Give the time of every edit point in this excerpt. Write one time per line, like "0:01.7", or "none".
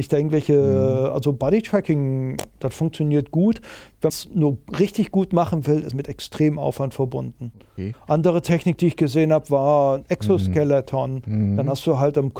0:04.1
0:05.9

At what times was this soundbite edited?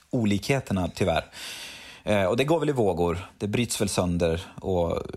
none

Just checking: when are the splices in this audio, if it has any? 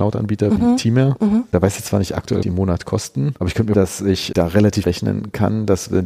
0:02.4
0:03.7
0:04.8

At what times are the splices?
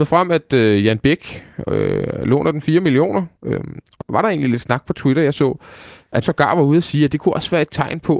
0:03.4
0:04.0
0:06.2

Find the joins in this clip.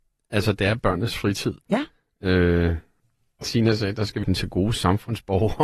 0:01.6
0:03.4
0:04.2

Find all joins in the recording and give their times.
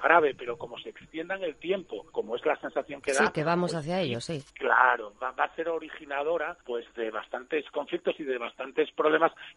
0:02.1
0:04.5
0:06.6

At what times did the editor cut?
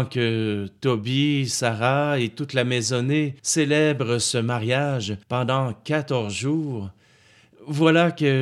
0:03.4
0:05.2

